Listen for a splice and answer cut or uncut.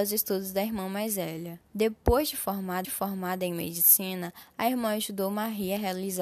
cut